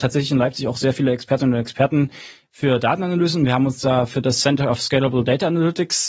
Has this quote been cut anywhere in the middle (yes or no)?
no